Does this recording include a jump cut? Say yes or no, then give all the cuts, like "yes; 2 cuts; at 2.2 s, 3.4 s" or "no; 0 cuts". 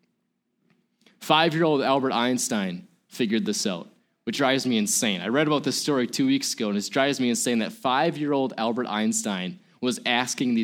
yes; 1 cut; at 4.3 s